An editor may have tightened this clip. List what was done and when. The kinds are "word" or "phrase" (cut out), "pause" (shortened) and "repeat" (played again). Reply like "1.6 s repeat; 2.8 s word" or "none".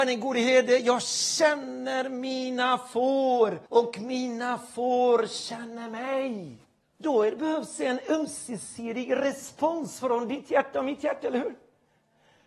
3.7 s pause; 6.8 s pause